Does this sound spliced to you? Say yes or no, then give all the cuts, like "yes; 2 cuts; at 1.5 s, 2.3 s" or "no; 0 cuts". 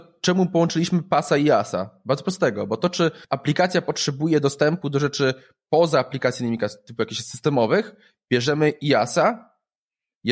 yes; 1 cut; at 3.2 s